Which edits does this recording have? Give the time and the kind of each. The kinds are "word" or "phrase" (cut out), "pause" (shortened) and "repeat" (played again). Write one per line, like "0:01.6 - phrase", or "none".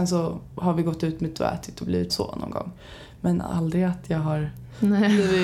0:01.3 - word
0:02.1 - word